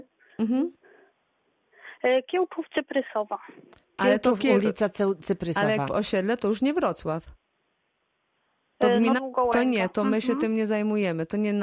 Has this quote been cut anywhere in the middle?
yes; 3 cuts; at 3.8 s, 5.9 s, 9.2 s

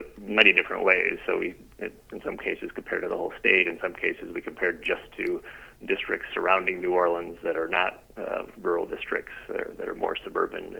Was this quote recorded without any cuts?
yes; 0 cuts

